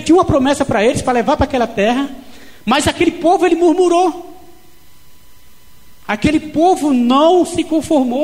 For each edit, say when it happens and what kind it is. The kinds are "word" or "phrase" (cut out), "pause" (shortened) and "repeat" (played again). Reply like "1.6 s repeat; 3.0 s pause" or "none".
none